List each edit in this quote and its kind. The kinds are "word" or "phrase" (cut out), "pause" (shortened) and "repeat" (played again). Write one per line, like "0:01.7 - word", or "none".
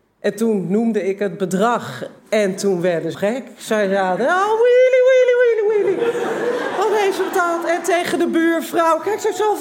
0:02.2 - pause
0:03.1 - word